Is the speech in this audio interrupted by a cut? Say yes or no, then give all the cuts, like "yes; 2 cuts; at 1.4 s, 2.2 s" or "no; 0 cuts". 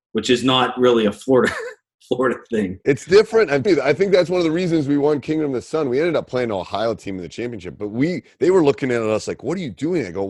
yes; 1 cut; at 3.6 s